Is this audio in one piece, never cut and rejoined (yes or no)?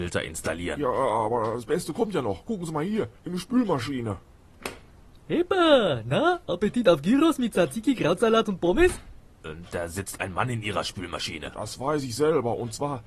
no